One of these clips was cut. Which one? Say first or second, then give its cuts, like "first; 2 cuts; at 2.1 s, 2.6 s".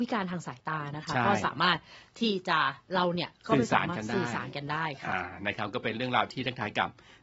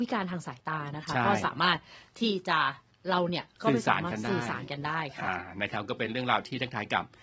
first; 1 cut; at 2.8 s